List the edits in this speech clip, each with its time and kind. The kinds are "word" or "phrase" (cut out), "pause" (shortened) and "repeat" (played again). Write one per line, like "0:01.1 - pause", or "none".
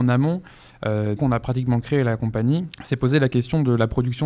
0:01.2 - word
0:02.7 - pause